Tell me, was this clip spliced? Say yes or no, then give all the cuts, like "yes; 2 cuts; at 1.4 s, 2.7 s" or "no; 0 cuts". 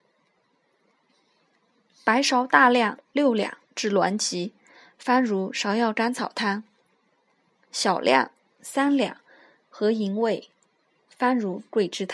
no; 0 cuts